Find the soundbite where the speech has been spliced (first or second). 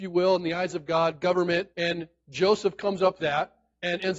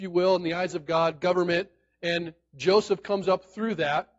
first